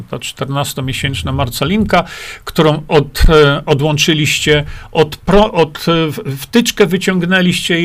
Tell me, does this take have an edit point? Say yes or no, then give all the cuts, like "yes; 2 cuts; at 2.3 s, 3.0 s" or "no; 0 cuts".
no; 0 cuts